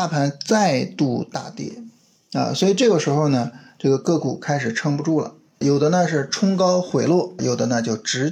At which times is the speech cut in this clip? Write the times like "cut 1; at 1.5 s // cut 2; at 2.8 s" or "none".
cut 1; at 5.6 s // cut 2; at 7.4 s